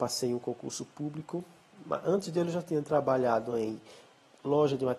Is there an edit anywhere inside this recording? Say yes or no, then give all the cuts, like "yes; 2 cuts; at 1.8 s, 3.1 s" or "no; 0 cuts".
no; 0 cuts